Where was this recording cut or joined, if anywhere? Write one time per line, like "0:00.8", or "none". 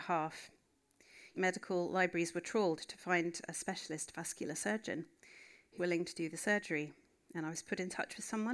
0:01.3
0:05.8